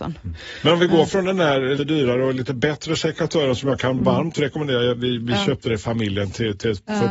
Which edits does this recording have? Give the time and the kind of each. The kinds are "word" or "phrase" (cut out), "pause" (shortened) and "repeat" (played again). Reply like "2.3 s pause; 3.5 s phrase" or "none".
1.8 s word; 5.7 s word

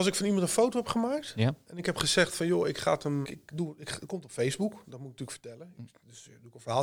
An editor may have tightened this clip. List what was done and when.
3.2 s word

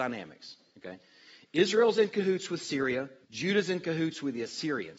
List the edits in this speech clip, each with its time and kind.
3.2 s pause

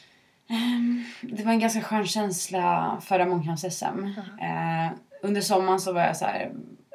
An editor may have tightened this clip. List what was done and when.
none

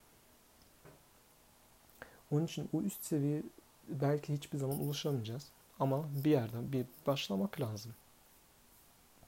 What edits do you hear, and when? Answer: none

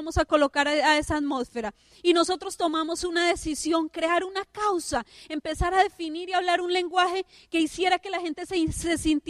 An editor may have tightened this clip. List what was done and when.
none

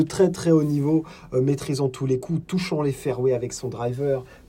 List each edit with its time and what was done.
none

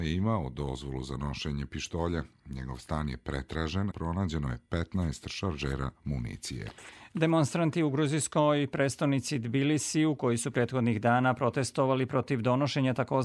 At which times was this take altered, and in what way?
3.9 s word

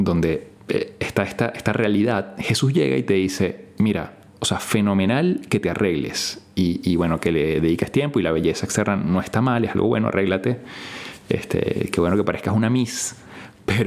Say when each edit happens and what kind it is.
4.3 s pause

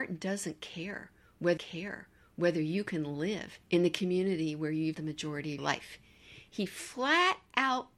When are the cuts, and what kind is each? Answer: 1.6 s repeat; 3.6 s pause; 4.9 s word; 5.6 s word

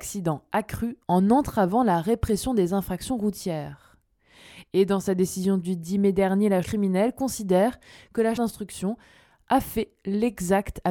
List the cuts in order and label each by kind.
6.6 s word; 8.4 s word

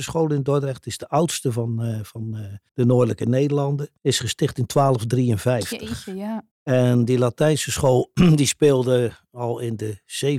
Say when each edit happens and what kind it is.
2.7 s pause; 4.0 s pause; 6.5 s pause

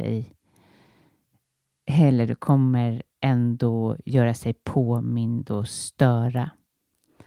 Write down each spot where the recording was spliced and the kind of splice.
3.1 s pause

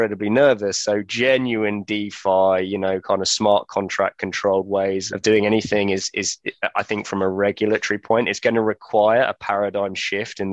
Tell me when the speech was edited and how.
5.1 s word

